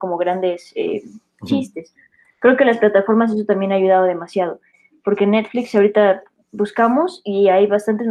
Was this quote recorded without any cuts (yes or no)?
yes